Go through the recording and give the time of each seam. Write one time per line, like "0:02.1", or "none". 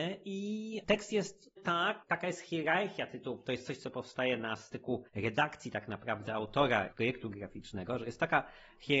0:01.6
0:05.1
0:06.9

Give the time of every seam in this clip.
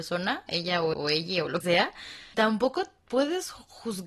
0:00.9
0:01.6
0:02.3

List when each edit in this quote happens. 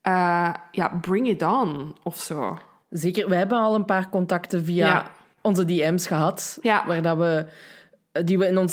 none

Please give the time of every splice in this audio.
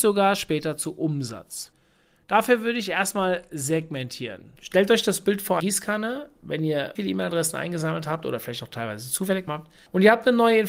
0:05.6
0:07.0
0:09.5

